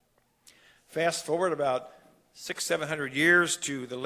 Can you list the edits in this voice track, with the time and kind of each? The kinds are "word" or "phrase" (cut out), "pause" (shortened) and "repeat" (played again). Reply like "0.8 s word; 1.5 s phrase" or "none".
none